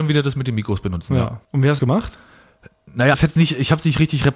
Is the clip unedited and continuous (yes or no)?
no